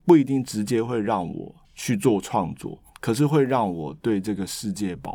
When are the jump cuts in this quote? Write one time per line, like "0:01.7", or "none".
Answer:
0:01.6
0:02.9